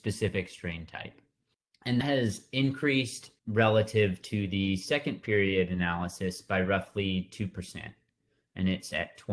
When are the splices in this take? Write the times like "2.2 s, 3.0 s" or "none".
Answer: 2.0 s, 3.4 s